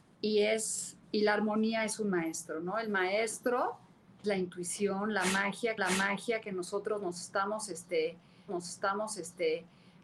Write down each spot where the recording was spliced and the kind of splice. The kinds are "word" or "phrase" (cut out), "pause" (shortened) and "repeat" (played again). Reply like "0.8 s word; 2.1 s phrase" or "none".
1.0 s pause; 4.2 s word; 5.8 s repeat; 8.5 s repeat